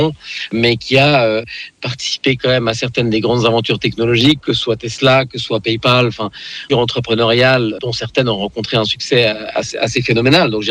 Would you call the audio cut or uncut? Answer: cut